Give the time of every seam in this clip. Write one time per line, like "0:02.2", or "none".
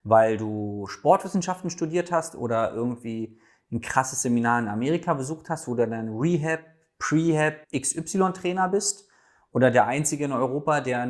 0:07.6